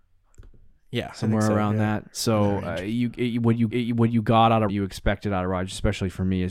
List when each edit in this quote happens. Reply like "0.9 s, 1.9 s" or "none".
3.7 s, 4.7 s